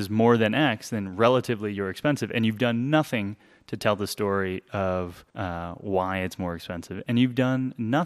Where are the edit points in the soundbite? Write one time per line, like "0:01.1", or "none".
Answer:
0:05.3